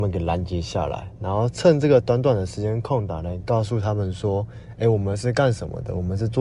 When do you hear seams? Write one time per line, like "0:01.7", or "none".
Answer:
none